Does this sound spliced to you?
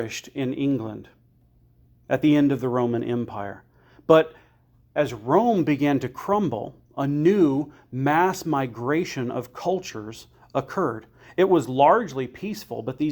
yes; 1 cut; at 6.8 s

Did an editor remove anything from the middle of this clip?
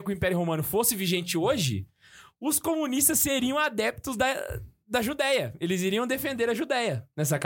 no; 0 cuts

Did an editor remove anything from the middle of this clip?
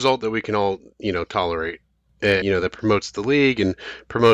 yes; 1 cut; at 2.4 s

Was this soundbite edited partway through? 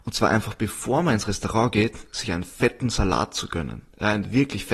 no; 0 cuts

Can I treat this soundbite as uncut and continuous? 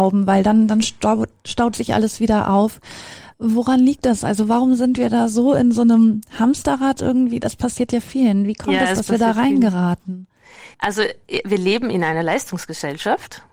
no; 2 cuts; at 3.3 s, 10.7 s

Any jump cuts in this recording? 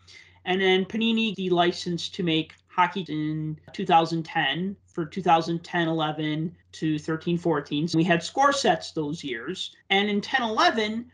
yes; 6 cuts; at 1.3 s, 3.1 s, 4.8 s, 6.6 s, 7.9 s, 9.8 s

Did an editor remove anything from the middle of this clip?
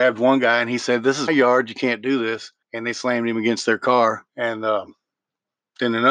yes; 3 cuts; at 1.3 s, 2.6 s, 4.3 s

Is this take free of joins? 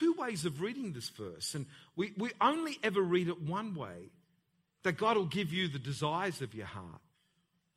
yes; 0 cuts

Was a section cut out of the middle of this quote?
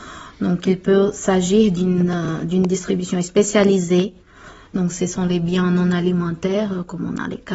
no; 0 cuts

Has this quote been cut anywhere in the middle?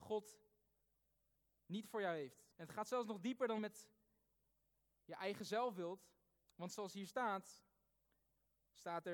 yes; 2 cuts; at 2.5 s, 3.6 s

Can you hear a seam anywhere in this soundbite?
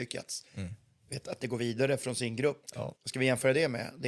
yes; 2 cuts; at 1.4 s, 3.0 s

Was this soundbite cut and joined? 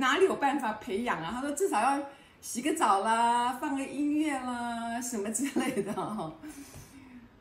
no; 0 cuts

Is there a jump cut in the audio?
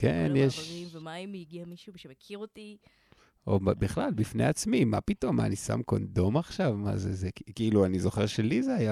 no; 0 cuts

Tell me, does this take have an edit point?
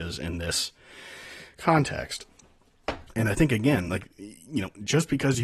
no; 0 cuts

